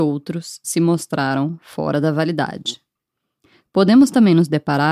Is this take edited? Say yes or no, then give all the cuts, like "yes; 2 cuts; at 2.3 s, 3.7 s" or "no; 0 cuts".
no; 0 cuts